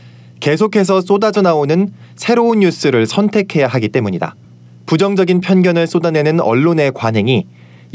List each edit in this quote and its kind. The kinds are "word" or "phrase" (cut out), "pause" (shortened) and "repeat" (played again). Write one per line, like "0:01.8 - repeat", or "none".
none